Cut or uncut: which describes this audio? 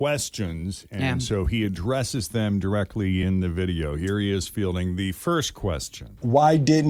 uncut